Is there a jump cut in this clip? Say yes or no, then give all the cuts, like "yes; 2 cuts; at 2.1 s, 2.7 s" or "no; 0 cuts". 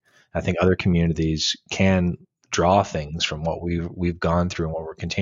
no; 0 cuts